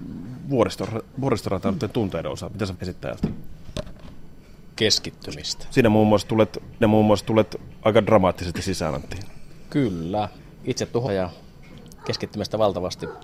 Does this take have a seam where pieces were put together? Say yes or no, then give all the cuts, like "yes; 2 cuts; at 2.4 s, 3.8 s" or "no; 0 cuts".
yes; 3 cuts; at 2.7 s, 6.8 s, 11.1 s